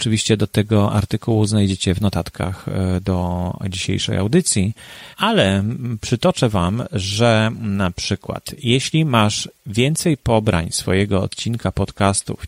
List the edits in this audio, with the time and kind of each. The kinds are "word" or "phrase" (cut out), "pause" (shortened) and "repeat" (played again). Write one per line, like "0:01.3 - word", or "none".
0:05.1 - pause